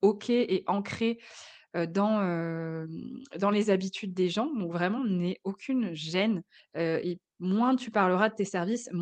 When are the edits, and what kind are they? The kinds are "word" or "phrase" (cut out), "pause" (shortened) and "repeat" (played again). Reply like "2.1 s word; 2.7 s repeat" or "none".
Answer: none